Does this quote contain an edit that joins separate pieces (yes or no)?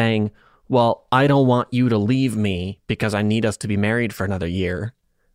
no